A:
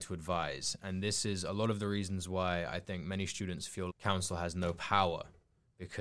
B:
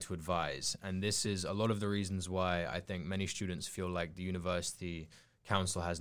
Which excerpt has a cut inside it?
A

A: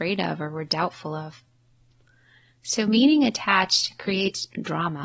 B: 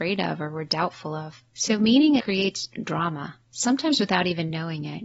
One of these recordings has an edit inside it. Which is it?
B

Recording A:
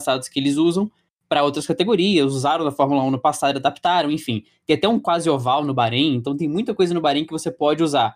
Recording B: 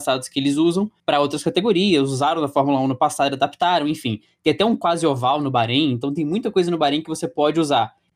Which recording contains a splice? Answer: B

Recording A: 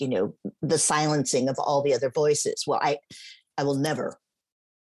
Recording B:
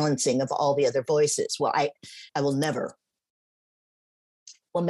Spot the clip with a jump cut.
B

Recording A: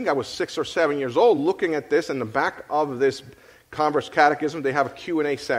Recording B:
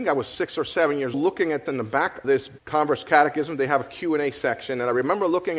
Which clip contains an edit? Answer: B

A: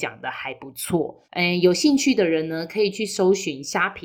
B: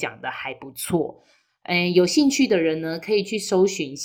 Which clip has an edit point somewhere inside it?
A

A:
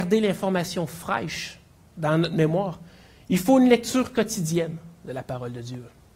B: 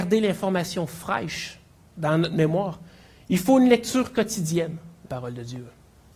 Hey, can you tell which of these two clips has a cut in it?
B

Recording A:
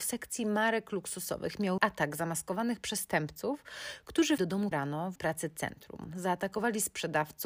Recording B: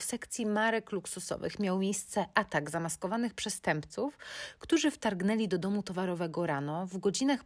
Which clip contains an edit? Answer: A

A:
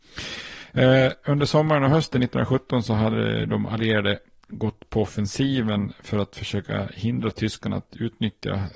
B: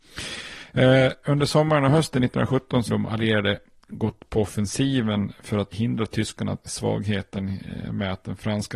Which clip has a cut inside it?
B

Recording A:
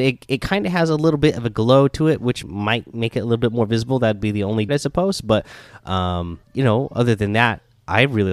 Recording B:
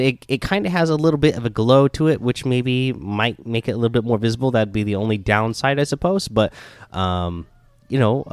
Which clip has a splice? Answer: A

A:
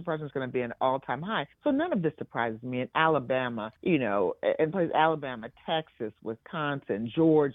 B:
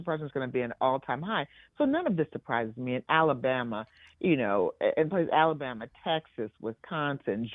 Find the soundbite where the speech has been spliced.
A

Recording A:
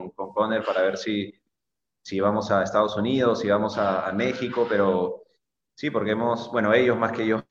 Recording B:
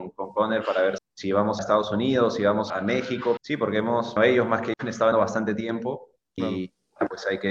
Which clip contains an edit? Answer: B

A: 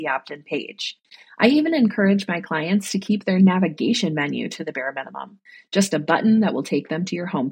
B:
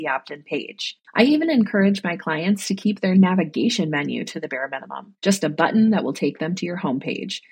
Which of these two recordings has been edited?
B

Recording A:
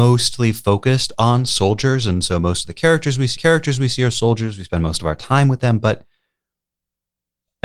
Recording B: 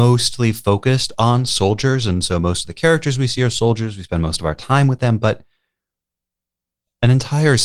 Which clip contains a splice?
A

